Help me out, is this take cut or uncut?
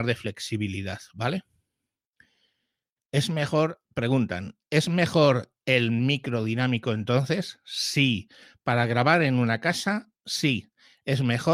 uncut